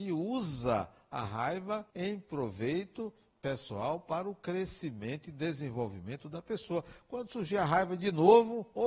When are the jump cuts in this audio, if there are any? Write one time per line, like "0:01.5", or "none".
0:01.9